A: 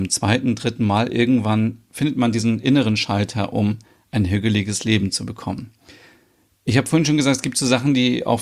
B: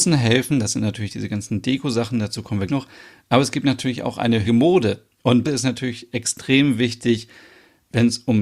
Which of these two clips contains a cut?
B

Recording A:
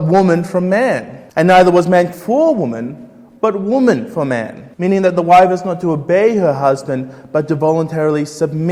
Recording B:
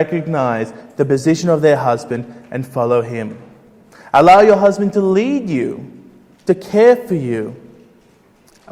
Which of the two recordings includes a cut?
A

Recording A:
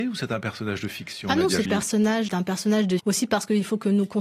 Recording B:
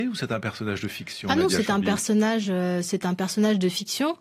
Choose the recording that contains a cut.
A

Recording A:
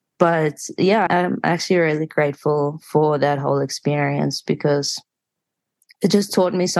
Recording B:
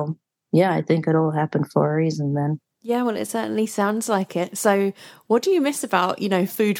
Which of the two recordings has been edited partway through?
A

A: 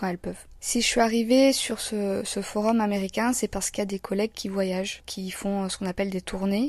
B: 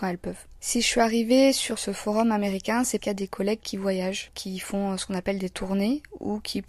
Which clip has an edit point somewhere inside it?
B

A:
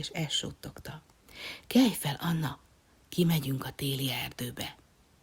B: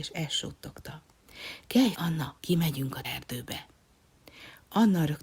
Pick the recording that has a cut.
B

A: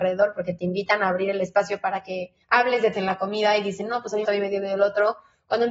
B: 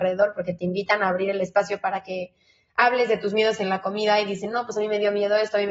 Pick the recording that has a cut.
A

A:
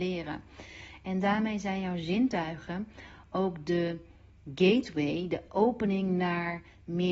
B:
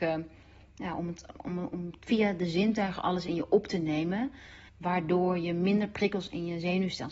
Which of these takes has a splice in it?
B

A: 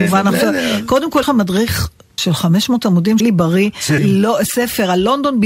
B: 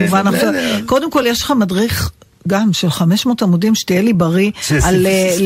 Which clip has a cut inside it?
A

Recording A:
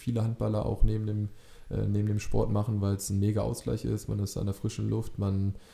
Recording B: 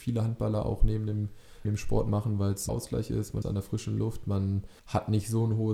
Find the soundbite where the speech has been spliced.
B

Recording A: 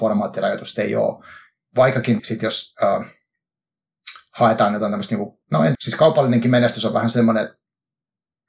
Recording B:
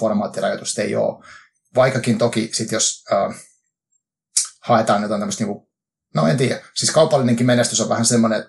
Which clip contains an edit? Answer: A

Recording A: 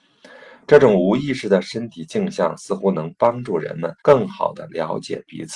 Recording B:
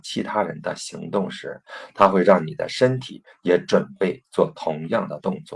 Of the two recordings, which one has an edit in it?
A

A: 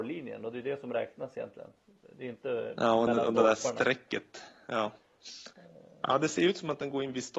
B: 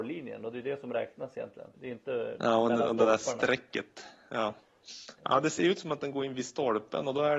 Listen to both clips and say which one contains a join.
B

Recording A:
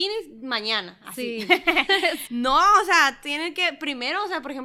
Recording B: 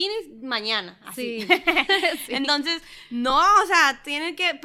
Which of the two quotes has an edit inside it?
A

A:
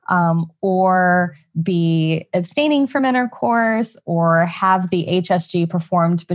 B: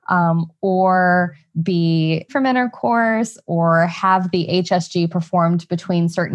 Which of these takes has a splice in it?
B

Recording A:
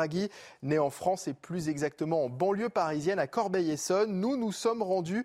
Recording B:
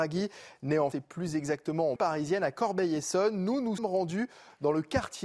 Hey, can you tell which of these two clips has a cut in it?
B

